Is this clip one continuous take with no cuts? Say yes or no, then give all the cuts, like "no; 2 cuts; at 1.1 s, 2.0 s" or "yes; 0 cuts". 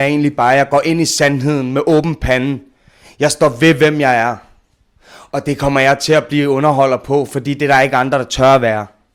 yes; 0 cuts